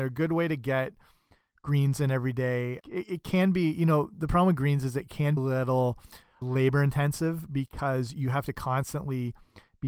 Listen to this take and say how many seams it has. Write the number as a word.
three